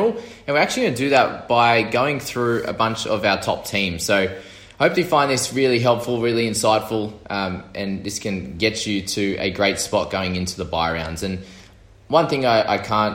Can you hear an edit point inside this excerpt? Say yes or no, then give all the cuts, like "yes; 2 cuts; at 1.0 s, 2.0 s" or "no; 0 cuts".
no; 0 cuts